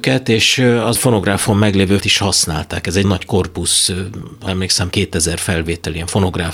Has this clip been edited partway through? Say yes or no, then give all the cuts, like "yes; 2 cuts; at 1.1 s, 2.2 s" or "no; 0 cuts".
yes; 5 cuts; at 0.9 s, 2.0 s, 3.0 s, 4.5 s, 4.9 s